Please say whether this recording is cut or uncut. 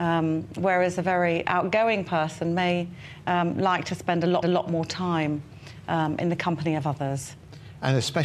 cut